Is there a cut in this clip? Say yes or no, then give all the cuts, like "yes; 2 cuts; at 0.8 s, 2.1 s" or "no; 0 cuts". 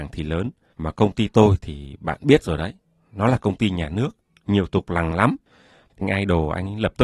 yes; 3 cuts; at 4.7 s, 5.1 s, 6.0 s